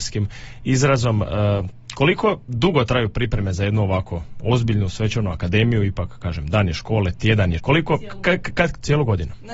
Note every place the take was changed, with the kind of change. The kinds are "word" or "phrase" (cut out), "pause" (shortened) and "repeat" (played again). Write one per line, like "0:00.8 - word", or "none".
0:07.6 - word

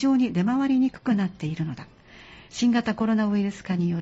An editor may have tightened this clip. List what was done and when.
none

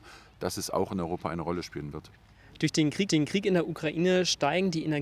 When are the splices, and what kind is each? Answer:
0:03.1 - repeat

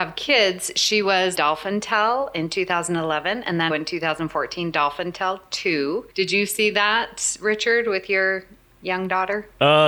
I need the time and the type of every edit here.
0:01.3 - phrase
0:03.7 - word
0:06.1 - pause

